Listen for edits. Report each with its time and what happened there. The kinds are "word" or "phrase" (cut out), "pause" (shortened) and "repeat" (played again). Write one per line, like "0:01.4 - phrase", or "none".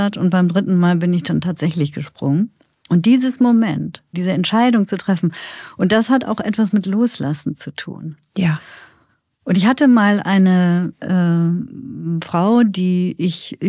0:04.1 - word